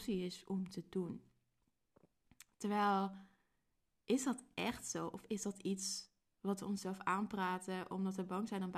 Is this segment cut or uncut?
uncut